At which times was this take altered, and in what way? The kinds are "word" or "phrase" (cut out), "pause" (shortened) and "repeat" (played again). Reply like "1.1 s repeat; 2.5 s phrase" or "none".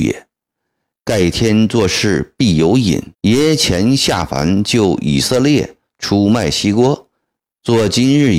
3.1 s pause

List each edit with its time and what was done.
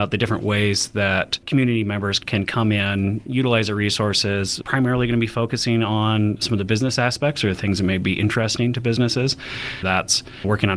9.8 s word

